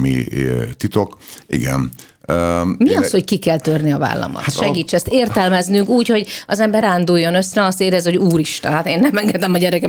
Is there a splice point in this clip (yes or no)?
yes